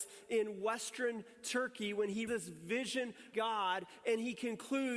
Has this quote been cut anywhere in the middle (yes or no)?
yes